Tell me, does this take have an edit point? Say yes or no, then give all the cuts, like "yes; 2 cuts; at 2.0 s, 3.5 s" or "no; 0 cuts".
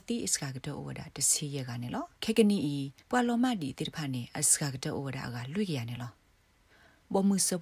yes; 2 cuts; at 2.1 s, 3.0 s